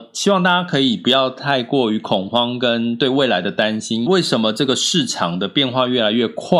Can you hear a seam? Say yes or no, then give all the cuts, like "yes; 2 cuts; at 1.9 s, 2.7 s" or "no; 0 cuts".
yes; 1 cut; at 4.1 s